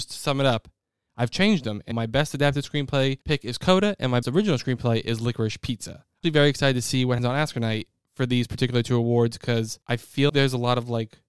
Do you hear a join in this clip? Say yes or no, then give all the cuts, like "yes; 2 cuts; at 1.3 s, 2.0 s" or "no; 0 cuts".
yes; 7 cuts; at 1.9 s, 3.2 s, 4.2 s, 6.2 s, 7.2 s, 9.8 s, 10.3 s